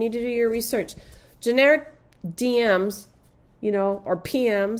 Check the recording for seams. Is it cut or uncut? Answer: uncut